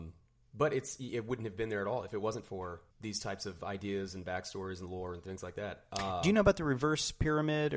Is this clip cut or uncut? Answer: cut